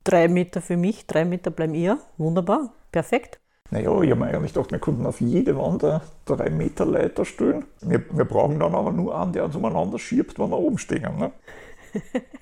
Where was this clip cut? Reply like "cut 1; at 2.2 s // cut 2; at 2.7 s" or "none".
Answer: none